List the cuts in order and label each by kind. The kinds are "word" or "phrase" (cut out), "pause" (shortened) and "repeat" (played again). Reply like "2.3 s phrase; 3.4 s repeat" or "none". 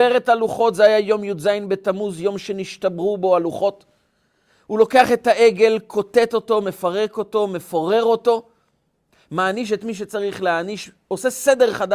none